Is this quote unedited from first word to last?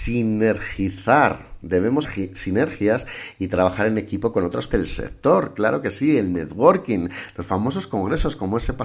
no; 2 cuts; at 2.0 s, 4.7 s

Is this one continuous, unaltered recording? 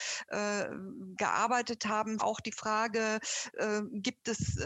no; 1 cut; at 2.2 s

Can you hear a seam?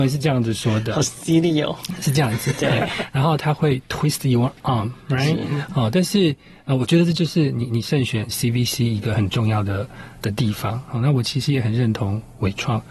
no; 0 cuts

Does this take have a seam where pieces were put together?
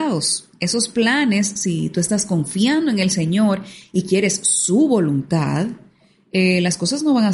no; 0 cuts

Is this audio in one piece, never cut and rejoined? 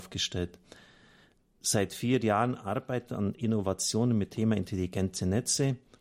no; 1 cut; at 4.3 s

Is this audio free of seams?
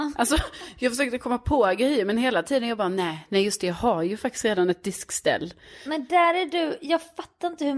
yes; 0 cuts

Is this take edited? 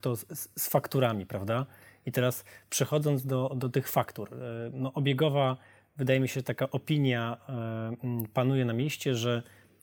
no; 0 cuts

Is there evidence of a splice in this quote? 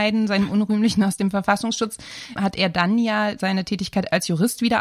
yes; 1 cut; at 2.4 s

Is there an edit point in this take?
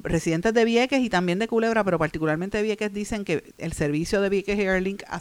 no; 0 cuts

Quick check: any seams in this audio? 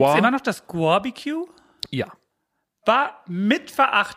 no; 0 cuts

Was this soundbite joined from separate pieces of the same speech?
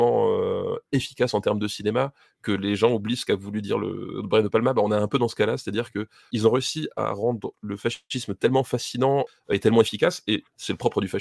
no; 0 cuts

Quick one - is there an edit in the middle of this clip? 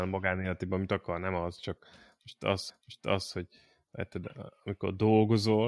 yes; 1 cut; at 2.7 s

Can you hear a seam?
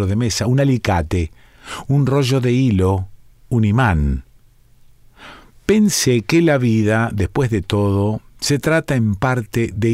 no; 0 cuts

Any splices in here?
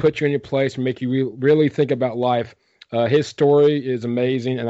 no; 0 cuts

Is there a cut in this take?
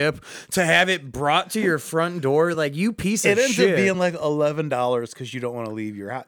no; 0 cuts

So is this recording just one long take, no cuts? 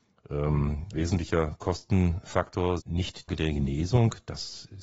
no; 3 cuts; at 0.9 s, 2.8 s, 3.3 s

